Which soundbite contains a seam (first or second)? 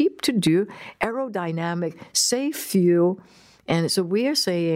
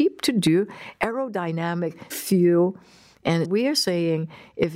second